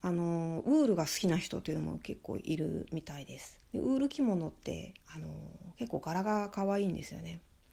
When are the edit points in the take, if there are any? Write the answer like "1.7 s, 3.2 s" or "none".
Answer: 3.7 s